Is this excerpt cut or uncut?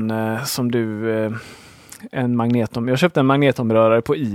uncut